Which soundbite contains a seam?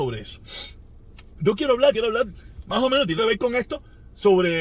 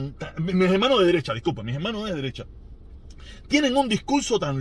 first; 2 cuts; at 1.9 s, 3.2 s

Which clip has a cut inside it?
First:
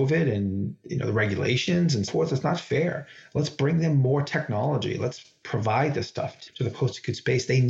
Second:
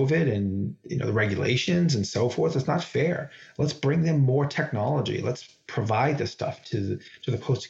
first; 2 cuts; at 2.1 s, 6.5 s

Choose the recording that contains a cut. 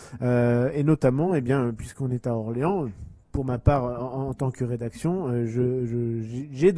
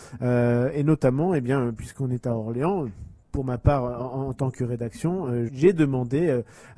second; 1 cut; at 5.5 s

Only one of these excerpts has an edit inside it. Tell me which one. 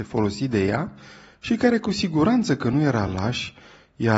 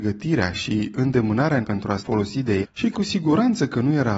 second; 4 cuts; at 1.6 s, 2.0 s, 2.6 s, 2.9 s

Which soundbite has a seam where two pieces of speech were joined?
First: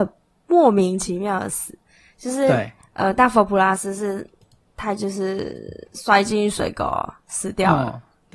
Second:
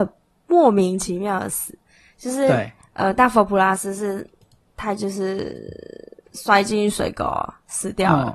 first; 1 cut; at 5.8 s

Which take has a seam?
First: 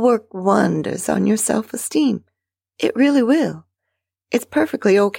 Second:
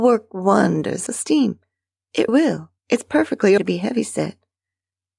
second; 4 cuts; at 1.1 s, 2.3 s, 2.8 s, 3.6 s

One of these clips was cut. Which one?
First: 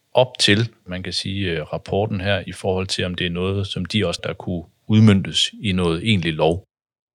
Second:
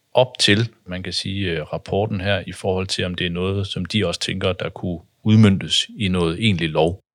first; 1 cut; at 4.2 s

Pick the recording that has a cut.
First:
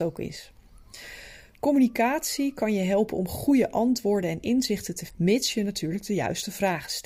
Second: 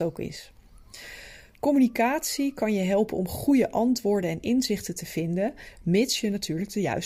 first; 1 cut; at 5.1 s

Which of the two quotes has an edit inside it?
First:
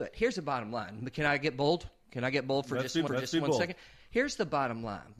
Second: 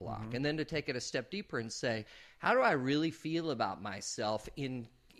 first; 1 cut; at 3.1 s

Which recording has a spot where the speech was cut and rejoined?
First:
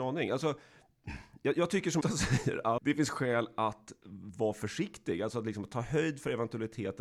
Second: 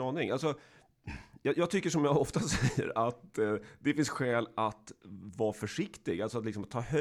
first; 2 cuts; at 2.0 s, 2.8 s

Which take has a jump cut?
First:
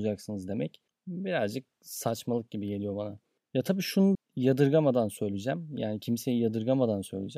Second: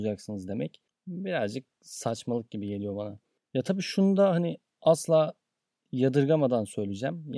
first; 1 cut; at 4.1 s

